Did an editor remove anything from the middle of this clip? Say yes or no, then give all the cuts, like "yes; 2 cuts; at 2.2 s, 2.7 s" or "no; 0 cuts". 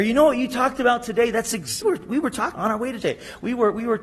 yes; 3 cuts; at 1.8 s, 2.5 s, 3.0 s